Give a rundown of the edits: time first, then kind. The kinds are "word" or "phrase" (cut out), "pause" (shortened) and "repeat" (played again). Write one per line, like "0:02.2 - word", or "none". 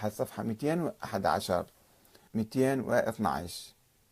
0:02.3 - word